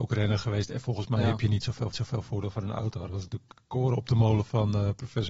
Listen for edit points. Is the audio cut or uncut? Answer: cut